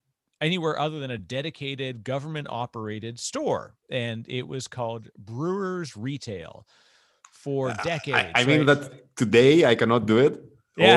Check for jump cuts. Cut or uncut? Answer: uncut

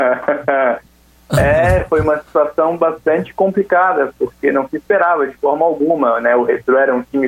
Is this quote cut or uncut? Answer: uncut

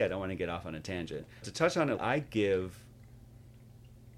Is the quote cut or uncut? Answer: cut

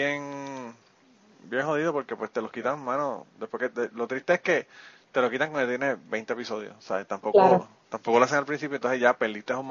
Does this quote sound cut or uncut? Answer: uncut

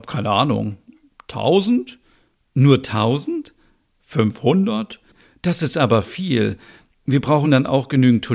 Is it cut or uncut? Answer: uncut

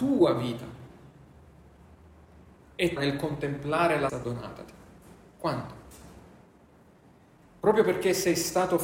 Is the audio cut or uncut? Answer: cut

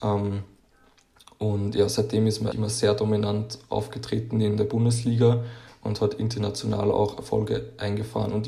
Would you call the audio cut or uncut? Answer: cut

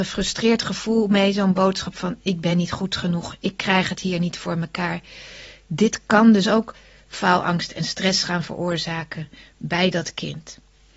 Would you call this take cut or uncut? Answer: uncut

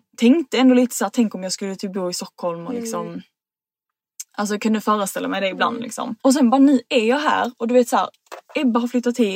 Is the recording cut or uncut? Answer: cut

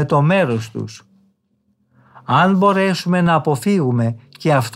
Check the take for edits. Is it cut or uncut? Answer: uncut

